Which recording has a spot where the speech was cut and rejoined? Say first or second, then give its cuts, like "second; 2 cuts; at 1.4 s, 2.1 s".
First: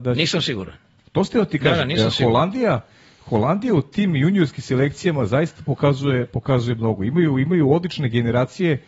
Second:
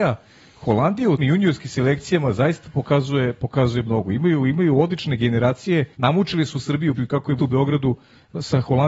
second; 4 cuts; at 1.2 s, 5.9 s, 7.0 s, 7.4 s